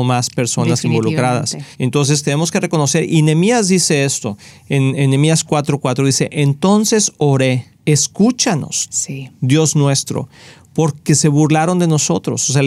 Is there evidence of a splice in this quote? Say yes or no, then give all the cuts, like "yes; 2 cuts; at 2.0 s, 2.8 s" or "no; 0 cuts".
yes; 2 cuts; at 1.7 s, 7.7 s